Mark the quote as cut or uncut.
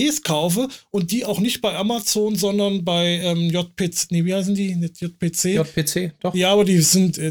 uncut